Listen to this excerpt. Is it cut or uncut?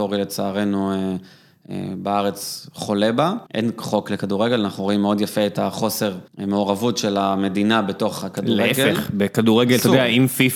cut